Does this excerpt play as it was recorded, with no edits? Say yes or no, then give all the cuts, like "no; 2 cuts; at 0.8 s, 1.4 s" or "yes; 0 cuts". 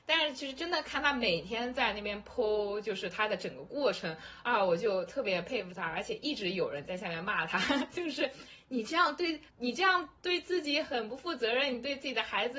no; 1 cut; at 9.5 s